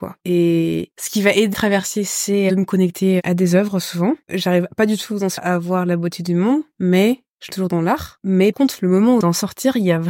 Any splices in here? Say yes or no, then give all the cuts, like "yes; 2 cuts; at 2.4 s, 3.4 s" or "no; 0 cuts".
yes; 5 cuts; at 1.5 s, 5.4 s, 7.5 s, 8.5 s, 9.2 s